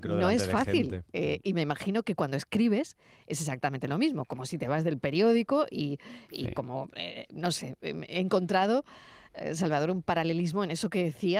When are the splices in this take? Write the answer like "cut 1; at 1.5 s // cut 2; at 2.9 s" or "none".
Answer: none